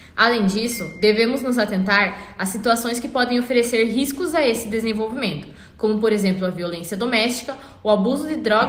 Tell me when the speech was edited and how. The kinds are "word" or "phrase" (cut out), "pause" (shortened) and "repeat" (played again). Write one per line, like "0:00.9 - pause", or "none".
none